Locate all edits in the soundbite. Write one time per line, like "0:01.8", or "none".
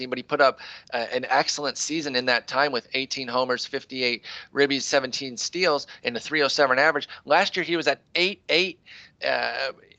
none